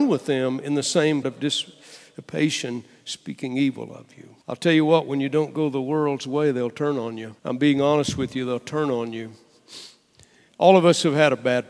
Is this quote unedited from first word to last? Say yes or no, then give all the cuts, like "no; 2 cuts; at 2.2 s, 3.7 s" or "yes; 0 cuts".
no; 3 cuts; at 1.2 s, 4.4 s, 7.4 s